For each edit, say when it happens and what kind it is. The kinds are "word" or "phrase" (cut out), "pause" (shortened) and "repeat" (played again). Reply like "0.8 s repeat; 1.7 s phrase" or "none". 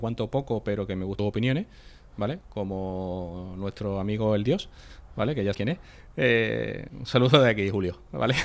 1.2 s word; 5.5 s word